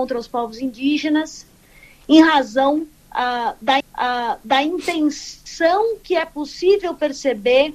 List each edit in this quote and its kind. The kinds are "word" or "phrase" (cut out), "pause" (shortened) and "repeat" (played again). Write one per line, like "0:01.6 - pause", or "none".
0:03.8 - repeat